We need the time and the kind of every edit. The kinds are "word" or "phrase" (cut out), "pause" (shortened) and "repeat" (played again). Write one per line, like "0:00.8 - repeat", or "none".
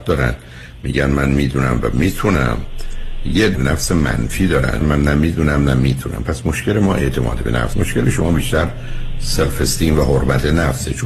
0:03.5 - word
0:04.8 - word
0:07.7 - word